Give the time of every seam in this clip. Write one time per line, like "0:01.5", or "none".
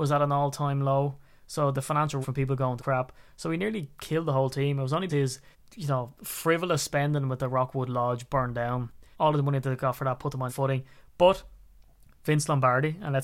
0:02.2
0:02.8
0:05.1
0:05.5
0:09.1
0:10.5

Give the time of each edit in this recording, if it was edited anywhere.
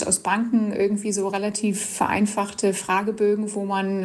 none

